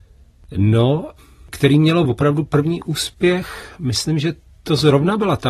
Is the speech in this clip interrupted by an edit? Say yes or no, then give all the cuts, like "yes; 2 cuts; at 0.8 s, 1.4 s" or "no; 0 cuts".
no; 0 cuts